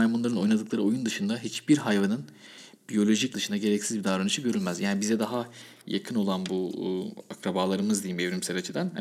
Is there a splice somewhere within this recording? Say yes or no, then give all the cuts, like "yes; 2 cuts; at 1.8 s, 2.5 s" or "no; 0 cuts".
yes; 1 cut; at 3.3 s